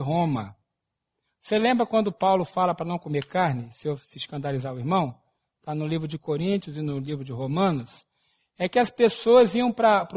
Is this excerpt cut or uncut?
uncut